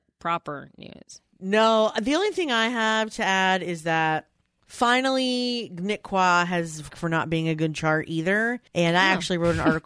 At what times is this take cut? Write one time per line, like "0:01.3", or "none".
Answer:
0:01.3
0:04.4
0:06.9
0:08.7